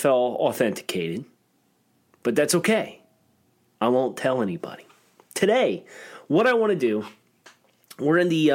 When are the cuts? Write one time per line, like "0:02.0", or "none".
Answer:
none

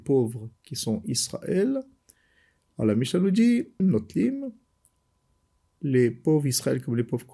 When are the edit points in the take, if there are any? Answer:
0:03.8

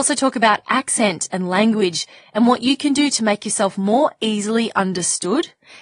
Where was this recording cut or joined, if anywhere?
none

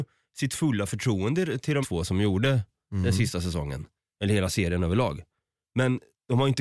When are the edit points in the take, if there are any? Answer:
0:01.8

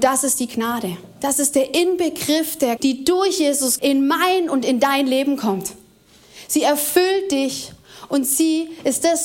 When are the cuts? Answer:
0:02.8
0:03.8

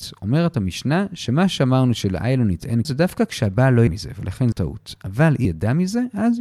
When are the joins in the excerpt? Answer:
0:02.8
0:03.9
0:04.5
0:05.4

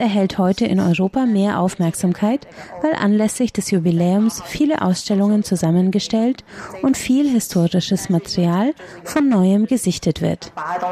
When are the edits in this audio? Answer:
none

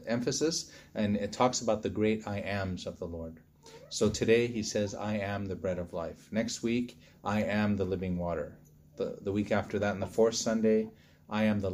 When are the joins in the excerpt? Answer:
none

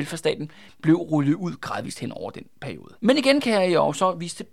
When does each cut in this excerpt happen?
0:03.0

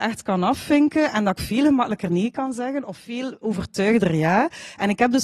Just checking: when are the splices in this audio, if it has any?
none

